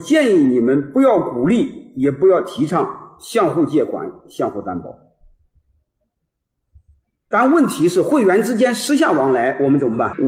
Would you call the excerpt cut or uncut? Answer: uncut